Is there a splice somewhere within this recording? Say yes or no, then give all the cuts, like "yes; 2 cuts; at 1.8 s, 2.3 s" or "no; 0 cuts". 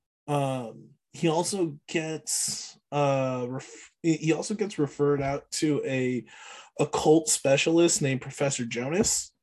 no; 0 cuts